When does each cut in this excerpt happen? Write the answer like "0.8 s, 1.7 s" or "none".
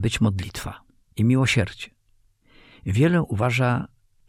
1.1 s